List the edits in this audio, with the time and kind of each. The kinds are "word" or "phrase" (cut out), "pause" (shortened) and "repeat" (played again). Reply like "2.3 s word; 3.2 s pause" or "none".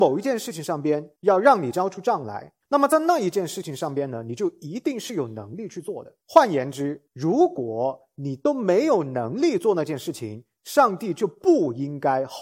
1.2 s pause; 2.6 s pause; 6.2 s pause; 7.1 s pause